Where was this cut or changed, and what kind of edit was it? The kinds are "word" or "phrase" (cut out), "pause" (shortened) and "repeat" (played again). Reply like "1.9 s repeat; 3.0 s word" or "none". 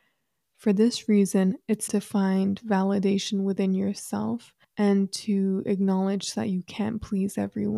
1.9 s word; 4.6 s pause